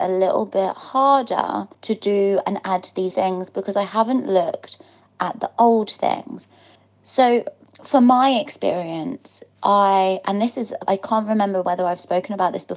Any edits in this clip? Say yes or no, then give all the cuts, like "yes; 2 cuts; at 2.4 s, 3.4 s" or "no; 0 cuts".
yes; 4 cuts; at 1.7 s, 3.1 s, 6.8 s, 10.9 s